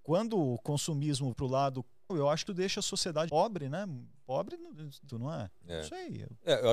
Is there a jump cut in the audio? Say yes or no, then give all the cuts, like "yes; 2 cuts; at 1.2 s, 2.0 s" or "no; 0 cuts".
yes; 5 cuts; at 1.3 s, 2.1 s, 2.5 s, 3.3 s, 5.1 s